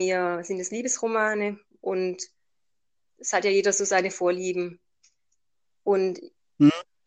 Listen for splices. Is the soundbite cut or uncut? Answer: uncut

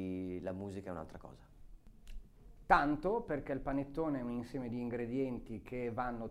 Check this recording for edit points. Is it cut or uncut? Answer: uncut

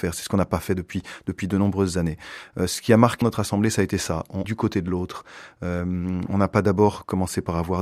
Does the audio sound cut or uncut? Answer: cut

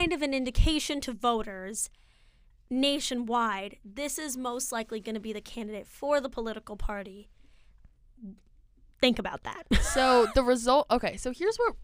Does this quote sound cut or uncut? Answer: uncut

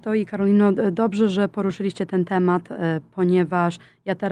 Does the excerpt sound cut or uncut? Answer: uncut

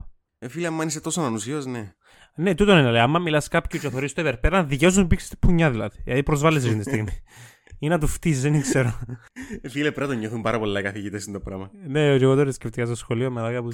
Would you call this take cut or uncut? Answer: uncut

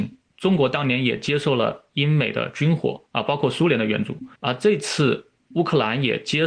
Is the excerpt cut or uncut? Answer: cut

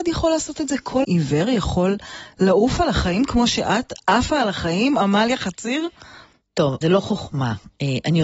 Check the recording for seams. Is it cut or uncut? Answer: cut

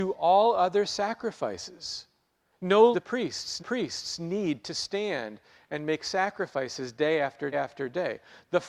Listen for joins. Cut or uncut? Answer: cut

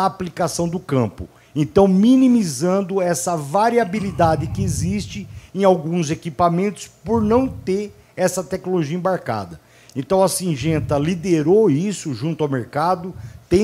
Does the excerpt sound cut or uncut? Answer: uncut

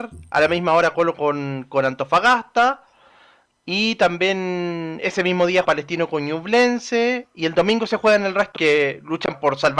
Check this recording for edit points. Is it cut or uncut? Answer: cut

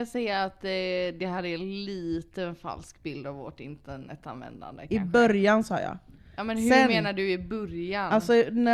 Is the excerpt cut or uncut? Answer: uncut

